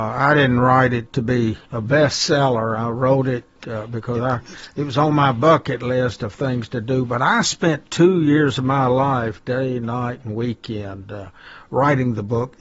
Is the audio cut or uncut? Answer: cut